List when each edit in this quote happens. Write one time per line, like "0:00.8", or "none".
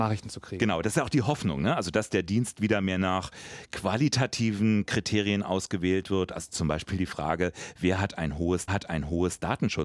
0:08.7